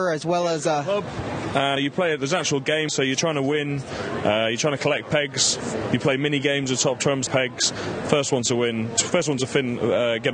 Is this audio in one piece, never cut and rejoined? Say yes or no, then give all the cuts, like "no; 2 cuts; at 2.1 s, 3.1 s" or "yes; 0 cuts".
no; 3 cuts; at 1.8 s, 2.9 s, 7.3 s